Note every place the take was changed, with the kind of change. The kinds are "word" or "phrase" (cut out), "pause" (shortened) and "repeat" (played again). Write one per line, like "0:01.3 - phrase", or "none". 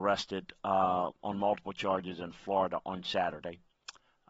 none